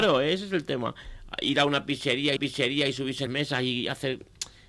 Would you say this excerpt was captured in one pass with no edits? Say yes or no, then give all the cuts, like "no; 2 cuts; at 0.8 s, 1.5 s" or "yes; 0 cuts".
no; 2 cuts; at 2.4 s, 3.3 s